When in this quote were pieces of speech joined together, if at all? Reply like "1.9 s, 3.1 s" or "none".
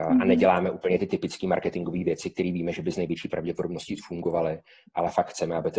none